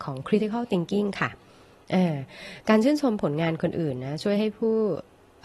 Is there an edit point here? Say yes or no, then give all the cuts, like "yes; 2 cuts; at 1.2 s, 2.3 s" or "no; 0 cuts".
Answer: no; 0 cuts